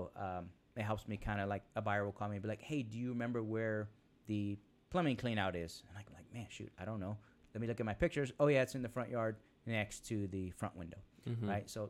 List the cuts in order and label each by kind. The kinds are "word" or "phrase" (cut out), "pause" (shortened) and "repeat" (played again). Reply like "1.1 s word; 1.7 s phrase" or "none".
none